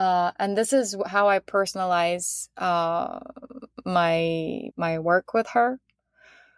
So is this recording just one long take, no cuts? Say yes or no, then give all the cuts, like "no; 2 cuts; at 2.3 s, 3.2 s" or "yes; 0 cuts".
no; 1 cut; at 4.7 s